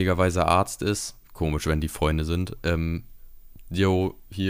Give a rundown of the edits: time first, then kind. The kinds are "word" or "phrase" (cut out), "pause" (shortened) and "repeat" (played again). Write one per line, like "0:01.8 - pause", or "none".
none